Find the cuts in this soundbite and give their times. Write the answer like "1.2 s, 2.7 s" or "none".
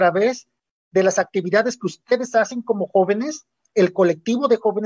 none